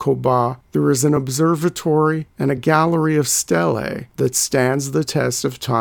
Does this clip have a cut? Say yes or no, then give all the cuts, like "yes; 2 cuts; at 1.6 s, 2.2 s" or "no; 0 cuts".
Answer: no; 0 cuts